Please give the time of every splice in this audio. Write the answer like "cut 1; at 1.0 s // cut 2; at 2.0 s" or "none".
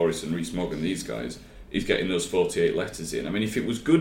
none

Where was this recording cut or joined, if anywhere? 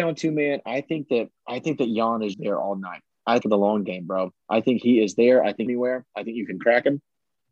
cut 1; at 2.3 s // cut 2; at 3.4 s // cut 3; at 5.7 s

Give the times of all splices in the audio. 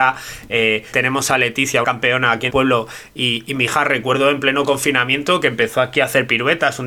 cut 1; at 0.9 s // cut 2; at 1.8 s // cut 3; at 2.5 s

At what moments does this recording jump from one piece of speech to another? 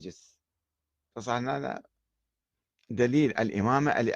none

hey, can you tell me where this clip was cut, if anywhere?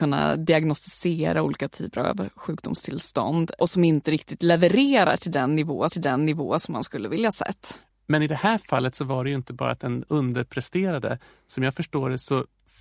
cut 1; at 5.9 s

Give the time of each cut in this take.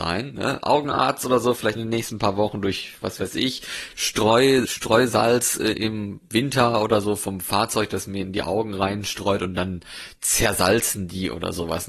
cut 1; at 1.8 s // cut 2; at 4.7 s

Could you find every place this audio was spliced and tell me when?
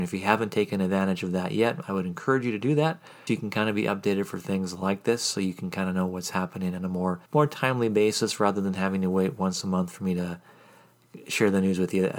cut 1; at 3.3 s // cut 2; at 7.3 s

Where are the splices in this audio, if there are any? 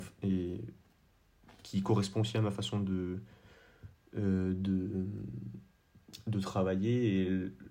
none

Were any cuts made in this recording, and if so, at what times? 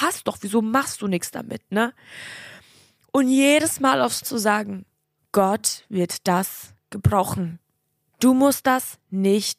cut 1; at 4.2 s

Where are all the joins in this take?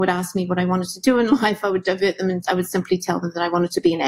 cut 1; at 2.4 s

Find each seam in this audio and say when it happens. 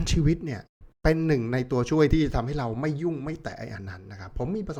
cut 1; at 0.9 s

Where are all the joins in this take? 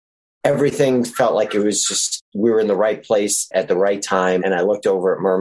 none

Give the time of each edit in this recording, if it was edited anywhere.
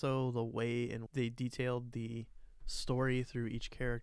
cut 1; at 1.1 s

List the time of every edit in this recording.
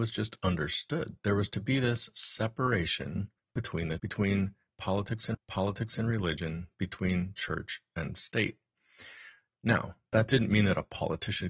cut 1; at 3.4 s // cut 2; at 4.0 s // cut 3; at 5.3 s

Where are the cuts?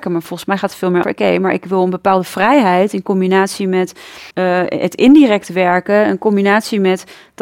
cut 1; at 1.0 s // cut 2; at 4.3 s

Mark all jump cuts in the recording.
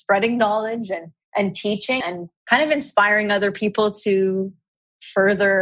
cut 1; at 2.0 s // cut 2; at 2.4 s

